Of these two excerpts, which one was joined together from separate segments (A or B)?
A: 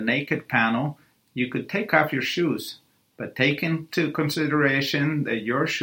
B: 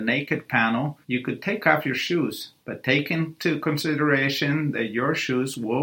B